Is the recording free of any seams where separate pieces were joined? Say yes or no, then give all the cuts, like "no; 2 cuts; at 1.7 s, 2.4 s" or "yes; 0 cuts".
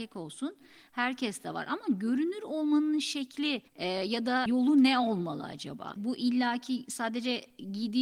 no; 1 cut; at 3.7 s